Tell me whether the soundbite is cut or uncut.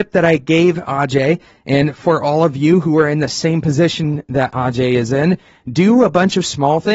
uncut